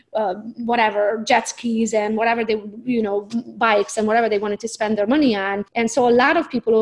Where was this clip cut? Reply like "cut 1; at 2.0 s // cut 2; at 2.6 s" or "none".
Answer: cut 1; at 5.7 s